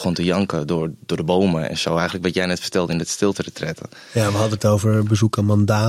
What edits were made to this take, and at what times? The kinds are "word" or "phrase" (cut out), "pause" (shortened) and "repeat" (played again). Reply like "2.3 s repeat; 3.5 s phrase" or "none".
4.6 s word